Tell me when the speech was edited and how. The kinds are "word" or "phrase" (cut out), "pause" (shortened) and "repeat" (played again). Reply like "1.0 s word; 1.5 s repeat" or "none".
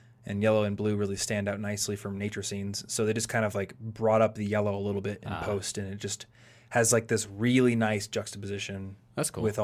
none

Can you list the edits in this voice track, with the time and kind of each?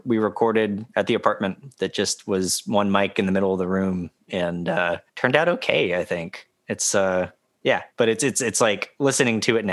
5.1 s pause; 6.6 s pause; 7.9 s pause

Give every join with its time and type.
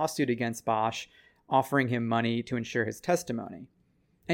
none

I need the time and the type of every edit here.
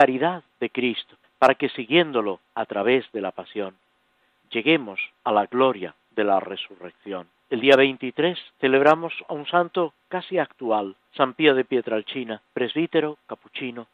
1.2 s pause; 2.5 s pause; 5.2 s pause; 6.0 s pause; 7.4 s pause; 8.5 s pause; 11.1 s pause; 12.5 s pause

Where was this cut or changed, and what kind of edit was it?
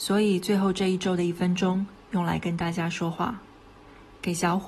none

